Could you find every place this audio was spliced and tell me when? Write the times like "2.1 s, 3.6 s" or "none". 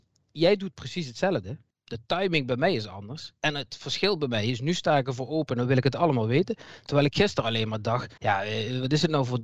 1.7 s, 3.4 s, 8.2 s